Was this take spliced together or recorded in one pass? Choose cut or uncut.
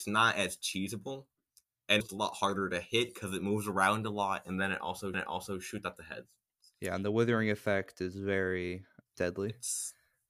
cut